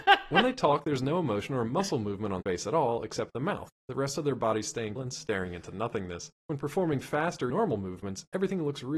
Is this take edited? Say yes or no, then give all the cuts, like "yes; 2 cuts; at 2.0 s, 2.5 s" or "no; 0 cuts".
yes; 4 cuts; at 2.4 s, 5.0 s, 6.4 s, 7.5 s